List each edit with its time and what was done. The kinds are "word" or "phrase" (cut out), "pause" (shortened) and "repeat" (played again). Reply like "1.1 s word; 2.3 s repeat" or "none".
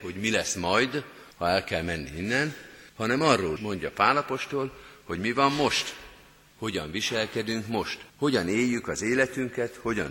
1.3 s pause; 2.9 s pause; 3.6 s word; 8.1 s pause